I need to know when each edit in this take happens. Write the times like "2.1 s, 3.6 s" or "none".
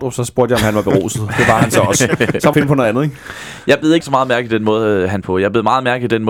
2.5 s, 4.0 s, 5.2 s